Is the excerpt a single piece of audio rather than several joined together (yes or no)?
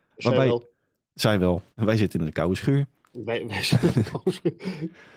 no